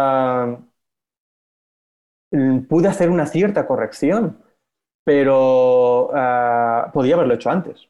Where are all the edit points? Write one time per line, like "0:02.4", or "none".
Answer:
none